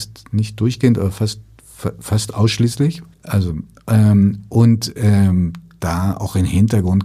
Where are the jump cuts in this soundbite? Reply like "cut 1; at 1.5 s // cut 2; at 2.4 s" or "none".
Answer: cut 1; at 3.1 s

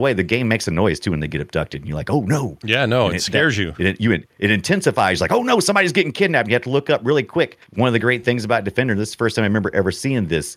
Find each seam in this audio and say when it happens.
cut 1; at 4.3 s // cut 2; at 7.7 s

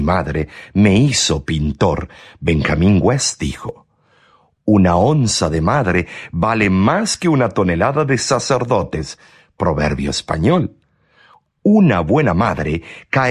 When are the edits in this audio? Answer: none

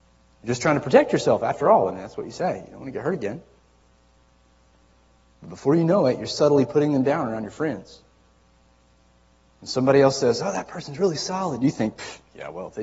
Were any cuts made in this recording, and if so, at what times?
none

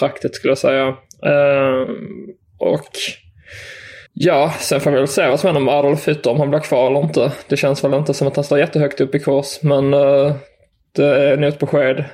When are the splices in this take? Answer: cut 1; at 4.1 s

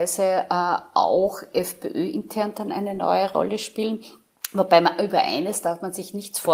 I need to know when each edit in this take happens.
none

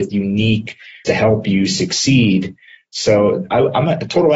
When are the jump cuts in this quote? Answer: cut 1; at 1.0 s

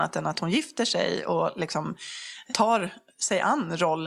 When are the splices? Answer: none

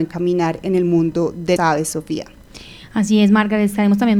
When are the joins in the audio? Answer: cut 1; at 1.6 s

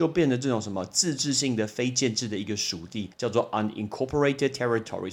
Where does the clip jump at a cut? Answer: cut 1; at 3.1 s

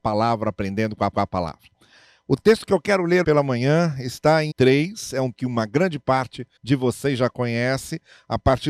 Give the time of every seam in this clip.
cut 1; at 1.1 s // cut 2; at 3.2 s // cut 3; at 4.5 s // cut 4; at 5.3 s // cut 5; at 6.6 s

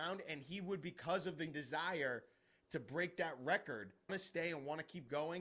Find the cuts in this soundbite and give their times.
cut 1; at 1.5 s // cut 2; at 4.1 s

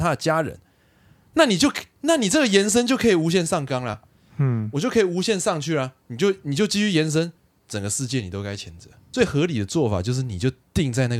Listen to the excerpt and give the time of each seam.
none

